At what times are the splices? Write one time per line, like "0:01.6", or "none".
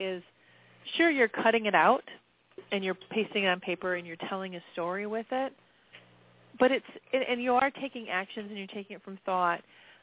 none